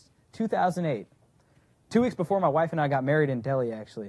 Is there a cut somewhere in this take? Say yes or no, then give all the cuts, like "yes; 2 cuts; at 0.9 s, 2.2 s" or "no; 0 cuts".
no; 0 cuts